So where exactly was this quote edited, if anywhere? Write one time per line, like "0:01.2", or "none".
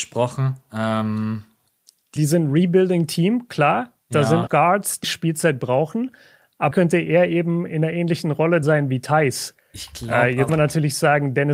0:02.2
0:04.5
0:05.0
0:06.7
0:08.6
0:10.5